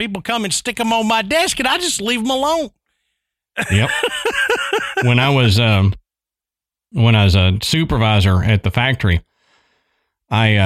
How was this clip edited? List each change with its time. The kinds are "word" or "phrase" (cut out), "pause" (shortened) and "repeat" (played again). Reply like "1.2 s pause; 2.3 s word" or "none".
none